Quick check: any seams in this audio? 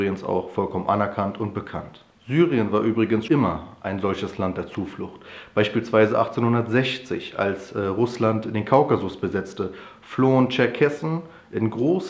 yes; 2 cuts; at 2.1 s, 3.3 s

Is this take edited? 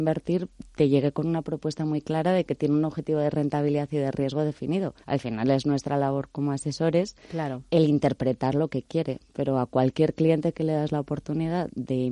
yes; 1 cut; at 5.0 s

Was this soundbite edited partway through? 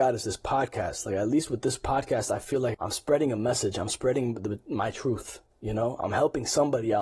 yes; 2 cuts; at 2.7 s, 5.5 s

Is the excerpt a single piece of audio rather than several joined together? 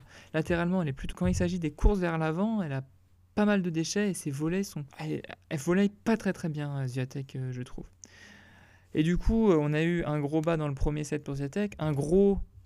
no; 2 cuts; at 1.1 s, 4.9 s

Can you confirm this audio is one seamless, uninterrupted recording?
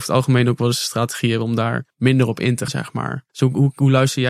no; 3 cuts; at 1.9 s, 2.7 s, 3.3 s

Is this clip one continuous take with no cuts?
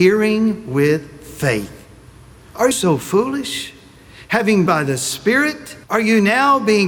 no; 3 cuts; at 2.7 s, 4.7 s, 5.8 s

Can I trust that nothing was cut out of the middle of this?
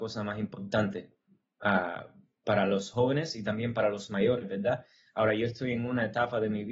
yes; 0 cuts

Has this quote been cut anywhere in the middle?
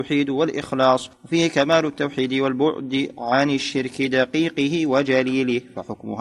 yes; 1 cut; at 1.1 s

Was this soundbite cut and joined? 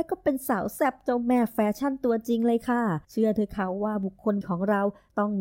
yes; 2 cuts; at 3.0 s, 4.4 s

